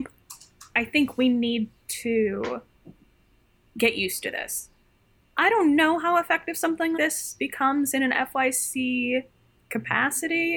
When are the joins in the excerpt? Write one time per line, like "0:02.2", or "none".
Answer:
0:06.9